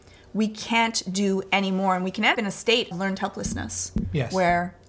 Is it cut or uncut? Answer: cut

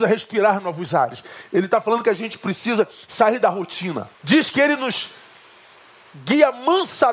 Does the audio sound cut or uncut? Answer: cut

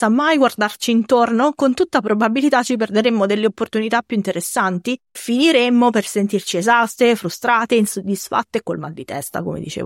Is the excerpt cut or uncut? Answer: cut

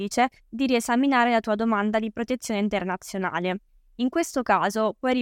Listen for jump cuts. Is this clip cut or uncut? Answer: cut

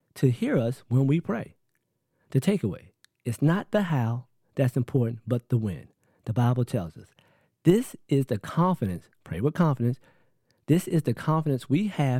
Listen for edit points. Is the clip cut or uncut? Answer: uncut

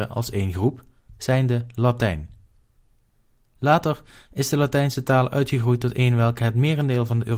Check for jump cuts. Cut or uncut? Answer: uncut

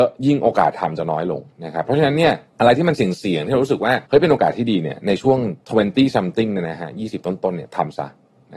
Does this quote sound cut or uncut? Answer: cut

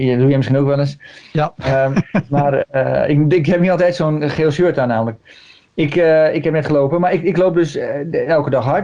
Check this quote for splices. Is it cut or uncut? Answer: uncut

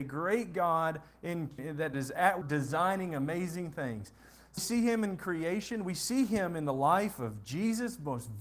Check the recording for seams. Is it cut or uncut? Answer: cut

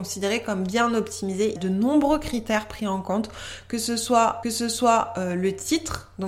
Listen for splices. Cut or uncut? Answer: cut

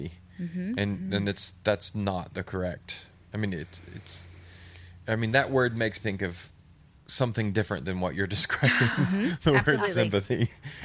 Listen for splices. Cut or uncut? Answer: cut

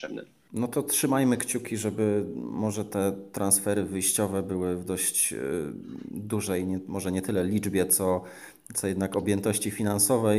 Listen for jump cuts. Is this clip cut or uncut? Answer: uncut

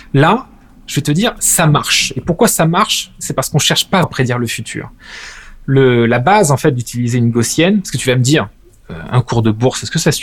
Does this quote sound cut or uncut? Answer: cut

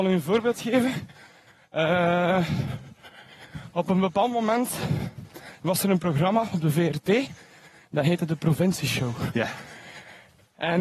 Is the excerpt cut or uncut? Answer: uncut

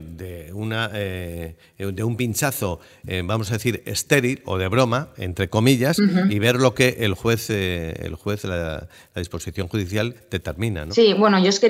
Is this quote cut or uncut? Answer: uncut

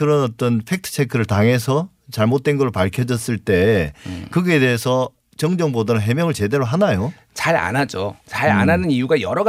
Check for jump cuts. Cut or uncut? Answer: cut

